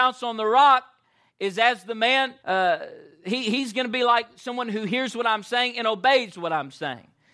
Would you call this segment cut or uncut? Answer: cut